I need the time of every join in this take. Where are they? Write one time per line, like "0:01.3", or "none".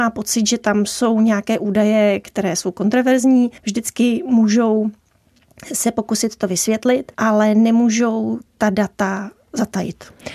0:03.6
0:07.1